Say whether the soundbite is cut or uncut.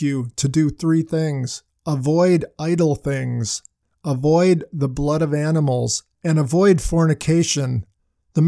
uncut